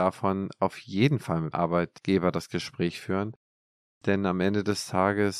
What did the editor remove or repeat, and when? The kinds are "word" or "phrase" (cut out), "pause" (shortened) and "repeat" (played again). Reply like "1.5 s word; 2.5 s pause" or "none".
1.5 s word